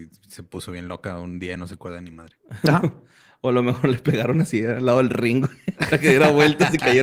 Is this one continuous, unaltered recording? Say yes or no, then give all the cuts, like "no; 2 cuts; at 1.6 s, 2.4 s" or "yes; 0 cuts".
yes; 0 cuts